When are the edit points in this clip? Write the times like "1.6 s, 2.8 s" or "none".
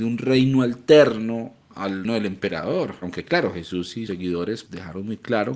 2.0 s, 4.1 s, 4.7 s